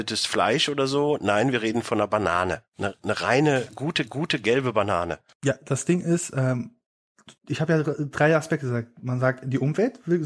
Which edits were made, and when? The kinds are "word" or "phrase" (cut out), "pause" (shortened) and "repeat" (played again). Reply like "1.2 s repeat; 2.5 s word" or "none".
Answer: 2.7 s pause; 4.1 s repeat; 7.4 s pause